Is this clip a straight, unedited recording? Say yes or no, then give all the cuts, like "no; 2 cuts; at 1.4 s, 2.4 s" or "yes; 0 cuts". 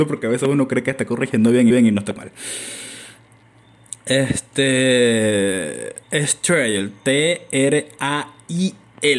no; 3 cuts; at 1.7 s, 2.2 s, 6.0 s